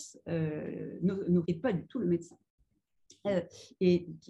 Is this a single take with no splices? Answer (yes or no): no